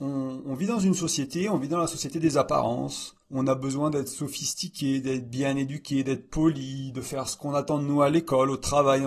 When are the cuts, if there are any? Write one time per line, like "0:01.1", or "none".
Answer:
0:03.2